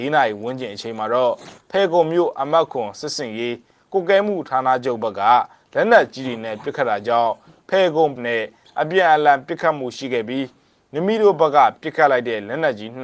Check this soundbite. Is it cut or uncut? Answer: cut